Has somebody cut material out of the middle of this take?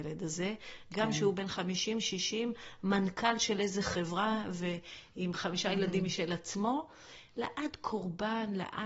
no; 0 cuts

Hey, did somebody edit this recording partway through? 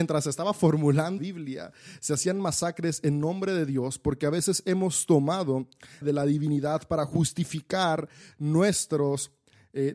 yes; 2 cuts; at 1.2 s, 6.0 s

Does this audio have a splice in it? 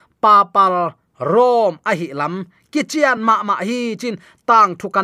no; 0 cuts

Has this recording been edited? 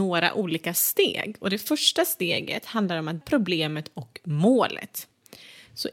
yes; 1 cut; at 3.2 s

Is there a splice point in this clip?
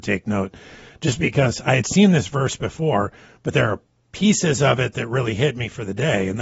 no; 0 cuts

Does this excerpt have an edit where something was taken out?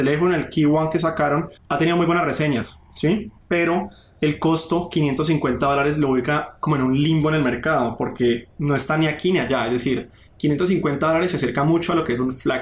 yes; 2 cuts; at 1.6 s, 3.4 s

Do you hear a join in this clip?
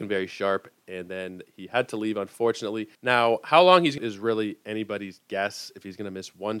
yes; 2 cuts; at 2.9 s, 4.0 s

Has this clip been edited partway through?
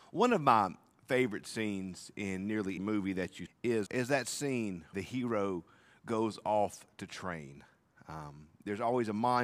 yes; 4 cuts; at 2.8 s, 3.5 s, 3.9 s, 4.9 s

